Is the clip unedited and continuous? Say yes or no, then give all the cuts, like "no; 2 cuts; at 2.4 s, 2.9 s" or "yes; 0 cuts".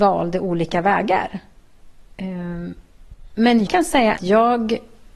no; 3 cuts; at 2.1 s, 3.7 s, 4.2 s